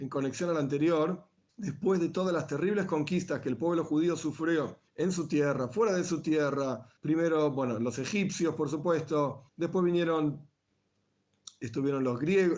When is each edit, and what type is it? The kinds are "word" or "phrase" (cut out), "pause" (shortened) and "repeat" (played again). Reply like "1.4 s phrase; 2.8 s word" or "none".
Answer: 1.5 s pause; 4.9 s pause; 7.0 s pause; 9.5 s pause

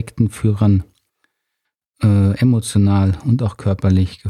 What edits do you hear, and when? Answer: none

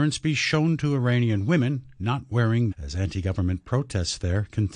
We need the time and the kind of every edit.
2.7 s phrase

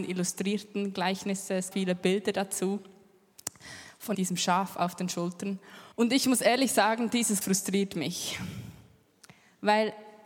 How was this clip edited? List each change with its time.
1.7 s phrase; 4.1 s phrase; 5.9 s pause; 7.4 s word

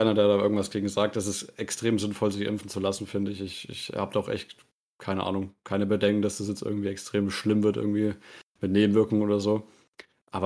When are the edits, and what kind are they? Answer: none

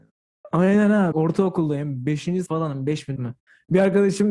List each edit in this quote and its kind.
1.1 s word; 2.5 s word; 3.2 s word

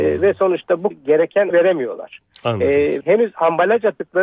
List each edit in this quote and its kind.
0.9 s word; 1.5 s word; 3.0 s word

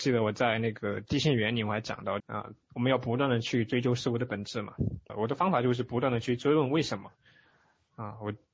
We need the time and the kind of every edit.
2.2 s phrase; 2.6 s pause; 5.1 s word

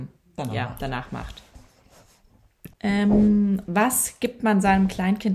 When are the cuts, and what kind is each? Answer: 2.7 s pause

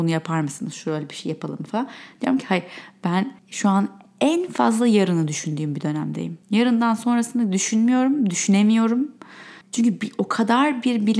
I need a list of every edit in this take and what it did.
3.4 s pause; 6.4 s pause; 9.6 s pause

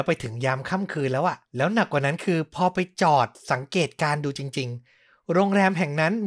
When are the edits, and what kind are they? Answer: 1.5 s pause

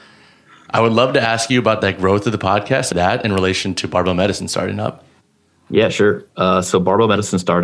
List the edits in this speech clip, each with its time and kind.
2.9 s phrase

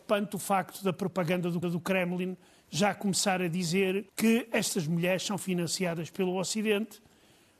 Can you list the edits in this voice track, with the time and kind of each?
1.6 s repeat; 4.1 s pause

